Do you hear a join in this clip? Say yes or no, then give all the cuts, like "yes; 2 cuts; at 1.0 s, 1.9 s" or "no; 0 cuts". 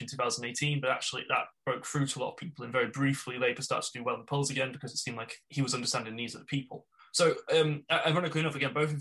yes; 2 cuts; at 5.4 s, 7.0 s